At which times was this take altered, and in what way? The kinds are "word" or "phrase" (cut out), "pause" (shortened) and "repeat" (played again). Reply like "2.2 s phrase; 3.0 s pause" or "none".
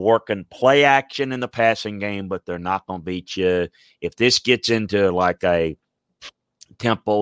none